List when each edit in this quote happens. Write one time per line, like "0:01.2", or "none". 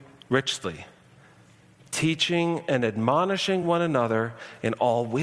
none